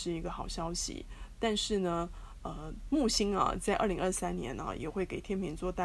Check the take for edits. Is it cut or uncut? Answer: uncut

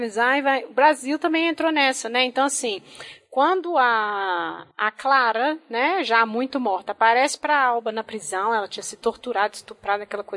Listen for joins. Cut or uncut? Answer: cut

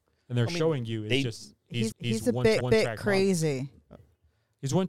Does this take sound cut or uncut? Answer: cut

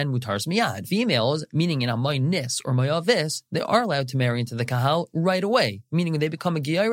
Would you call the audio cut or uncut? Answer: uncut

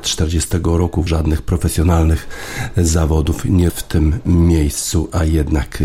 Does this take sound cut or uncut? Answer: cut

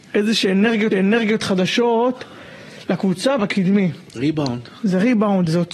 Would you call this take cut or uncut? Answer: cut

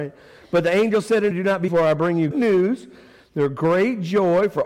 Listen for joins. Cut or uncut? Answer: cut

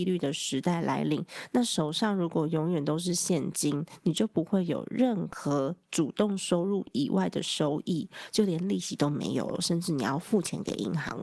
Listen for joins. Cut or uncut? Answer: uncut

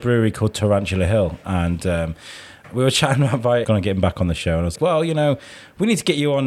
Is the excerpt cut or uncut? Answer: cut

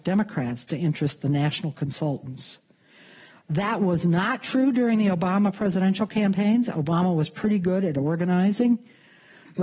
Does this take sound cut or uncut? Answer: uncut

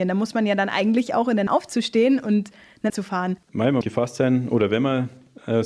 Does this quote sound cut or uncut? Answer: cut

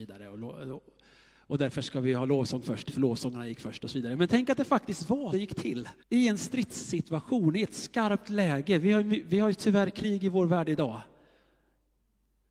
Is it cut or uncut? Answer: cut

